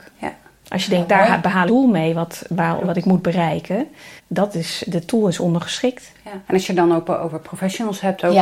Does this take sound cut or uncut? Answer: cut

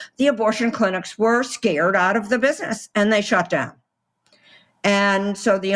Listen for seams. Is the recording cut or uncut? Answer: uncut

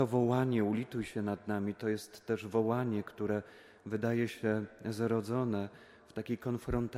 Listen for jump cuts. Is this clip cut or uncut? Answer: uncut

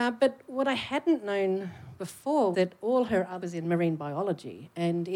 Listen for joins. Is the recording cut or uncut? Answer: cut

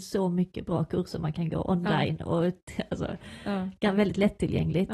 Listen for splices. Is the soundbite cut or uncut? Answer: uncut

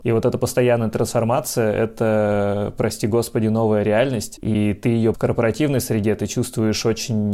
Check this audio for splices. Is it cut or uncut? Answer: cut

